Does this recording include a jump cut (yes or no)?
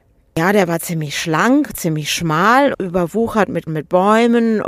yes